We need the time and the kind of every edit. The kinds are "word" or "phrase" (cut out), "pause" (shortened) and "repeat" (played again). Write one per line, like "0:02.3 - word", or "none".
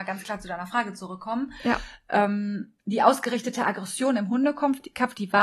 0:02.8 - pause